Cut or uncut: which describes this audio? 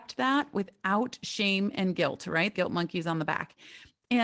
cut